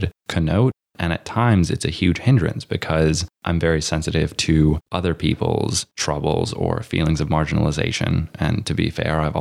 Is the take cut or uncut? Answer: uncut